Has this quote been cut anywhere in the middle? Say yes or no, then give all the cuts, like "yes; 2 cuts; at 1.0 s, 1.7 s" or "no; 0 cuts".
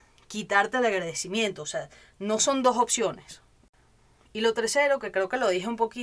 no; 0 cuts